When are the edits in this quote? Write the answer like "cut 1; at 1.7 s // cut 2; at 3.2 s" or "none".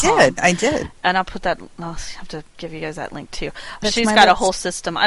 cut 1; at 3.8 s